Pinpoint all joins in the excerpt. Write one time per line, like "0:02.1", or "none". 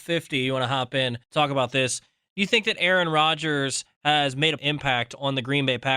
0:01.2
0:04.6